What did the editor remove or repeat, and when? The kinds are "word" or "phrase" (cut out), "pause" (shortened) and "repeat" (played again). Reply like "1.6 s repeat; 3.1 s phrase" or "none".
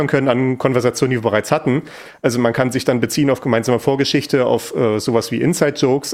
none